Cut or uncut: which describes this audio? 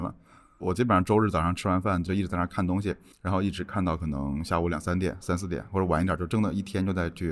cut